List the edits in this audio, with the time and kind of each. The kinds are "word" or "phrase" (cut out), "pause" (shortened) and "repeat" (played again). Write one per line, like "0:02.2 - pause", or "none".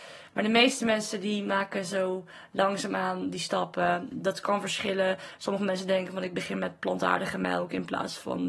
none